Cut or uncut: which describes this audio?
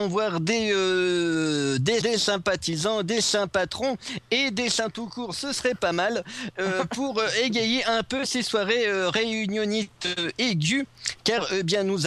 cut